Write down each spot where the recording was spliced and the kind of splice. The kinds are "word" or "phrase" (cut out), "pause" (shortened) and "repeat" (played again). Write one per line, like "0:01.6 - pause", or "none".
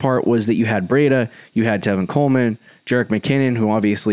none